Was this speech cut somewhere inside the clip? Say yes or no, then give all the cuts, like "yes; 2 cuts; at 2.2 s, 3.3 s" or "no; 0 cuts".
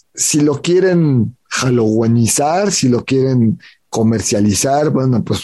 no; 0 cuts